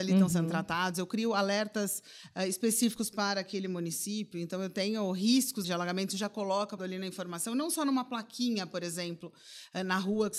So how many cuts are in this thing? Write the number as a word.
two